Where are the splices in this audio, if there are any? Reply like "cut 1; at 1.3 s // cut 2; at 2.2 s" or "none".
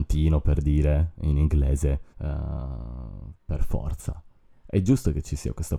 cut 1; at 2.1 s